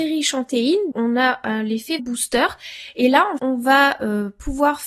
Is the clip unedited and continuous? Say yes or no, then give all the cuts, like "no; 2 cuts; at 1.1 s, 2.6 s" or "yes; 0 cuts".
no; 3 cuts; at 0.9 s, 2.0 s, 3.4 s